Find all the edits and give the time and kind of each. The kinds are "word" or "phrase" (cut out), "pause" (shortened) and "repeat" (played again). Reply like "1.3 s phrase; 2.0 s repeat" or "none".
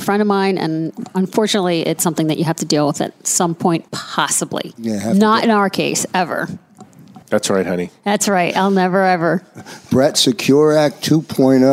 3.9 s pause; 7.2 s pause